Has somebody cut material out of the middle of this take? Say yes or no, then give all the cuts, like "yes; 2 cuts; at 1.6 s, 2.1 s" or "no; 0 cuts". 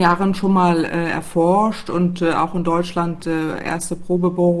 no; 0 cuts